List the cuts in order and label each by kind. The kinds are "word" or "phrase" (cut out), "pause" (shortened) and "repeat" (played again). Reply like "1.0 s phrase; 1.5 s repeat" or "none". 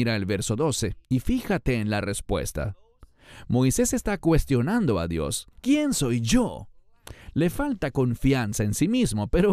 1.0 s pause; 5.5 s pause